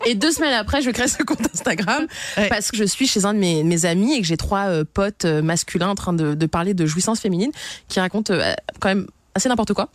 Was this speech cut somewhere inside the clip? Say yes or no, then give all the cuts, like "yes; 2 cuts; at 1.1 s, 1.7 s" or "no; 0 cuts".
yes; 1 cut; at 2.7 s